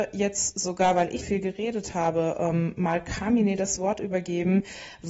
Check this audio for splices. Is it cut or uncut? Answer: cut